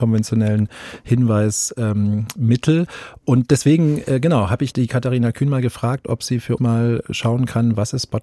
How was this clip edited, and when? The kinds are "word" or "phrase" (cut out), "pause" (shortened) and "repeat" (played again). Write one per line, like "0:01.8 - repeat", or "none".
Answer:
0:04.7 - word
0:06.6 - word